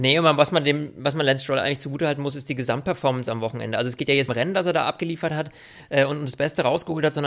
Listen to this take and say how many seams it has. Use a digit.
1